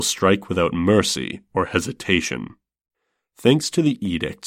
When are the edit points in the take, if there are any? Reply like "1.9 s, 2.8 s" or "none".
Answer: none